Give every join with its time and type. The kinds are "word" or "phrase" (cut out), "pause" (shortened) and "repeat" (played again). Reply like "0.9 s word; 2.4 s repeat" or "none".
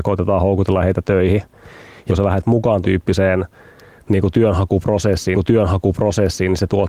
2.1 s phrase; 2.8 s word; 5.3 s repeat